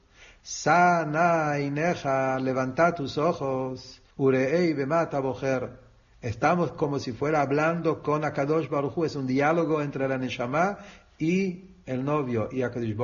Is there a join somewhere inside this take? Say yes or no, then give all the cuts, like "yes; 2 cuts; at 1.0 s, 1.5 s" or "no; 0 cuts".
yes; 1 cut; at 4.1 s